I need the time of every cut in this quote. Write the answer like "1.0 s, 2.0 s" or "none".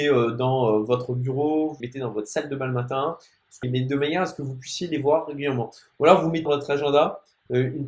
1.8 s, 3.6 s, 6.5 s